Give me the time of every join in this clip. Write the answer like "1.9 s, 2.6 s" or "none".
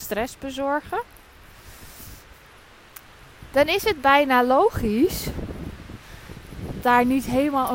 6.8 s